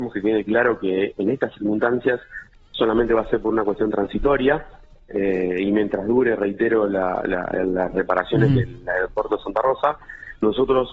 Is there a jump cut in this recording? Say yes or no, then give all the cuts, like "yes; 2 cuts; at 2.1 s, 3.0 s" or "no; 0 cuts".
no; 0 cuts